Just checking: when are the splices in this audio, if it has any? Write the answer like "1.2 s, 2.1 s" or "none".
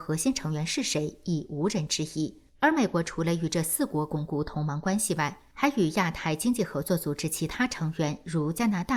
2.5 s, 5.5 s